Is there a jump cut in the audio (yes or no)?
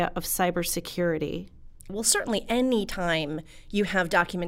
yes